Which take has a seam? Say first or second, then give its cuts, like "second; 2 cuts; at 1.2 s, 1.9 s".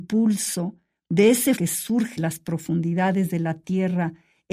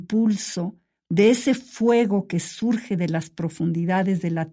first; 2 cuts; at 1.6 s, 2.2 s